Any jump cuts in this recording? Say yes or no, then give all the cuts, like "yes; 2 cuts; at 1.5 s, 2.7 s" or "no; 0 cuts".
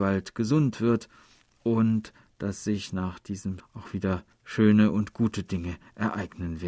yes; 2 cuts; at 3.6 s, 4.3 s